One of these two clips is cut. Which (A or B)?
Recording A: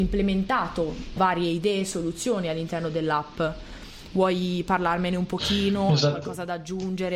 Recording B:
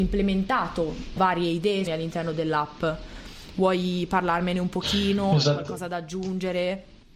B